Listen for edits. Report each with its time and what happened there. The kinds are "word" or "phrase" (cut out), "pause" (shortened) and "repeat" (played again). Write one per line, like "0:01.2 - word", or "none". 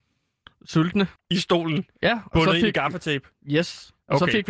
0:01.2 - pause